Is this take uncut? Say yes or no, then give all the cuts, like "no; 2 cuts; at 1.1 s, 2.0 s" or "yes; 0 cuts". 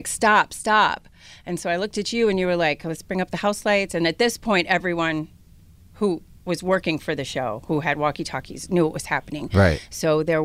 yes; 0 cuts